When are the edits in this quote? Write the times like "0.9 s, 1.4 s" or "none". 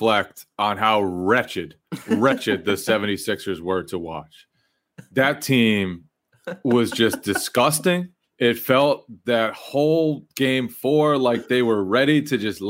1.8 s, 8.2 s